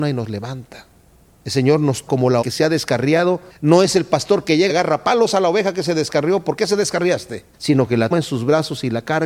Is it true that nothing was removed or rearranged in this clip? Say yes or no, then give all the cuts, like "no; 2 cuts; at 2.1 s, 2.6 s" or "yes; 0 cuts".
no; 7 cuts; at 1.1 s, 2.1 s, 2.4 s, 3.5 s, 4.7 s, 7.5 s, 8.1 s